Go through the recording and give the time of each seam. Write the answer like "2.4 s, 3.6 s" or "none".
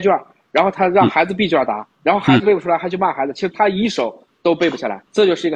1.9 s